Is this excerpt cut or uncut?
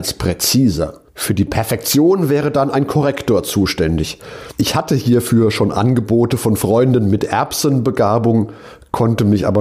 cut